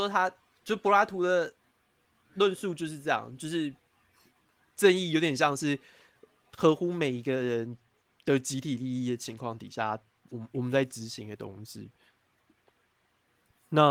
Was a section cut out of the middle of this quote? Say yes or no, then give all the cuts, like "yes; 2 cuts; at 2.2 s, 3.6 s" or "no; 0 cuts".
no; 0 cuts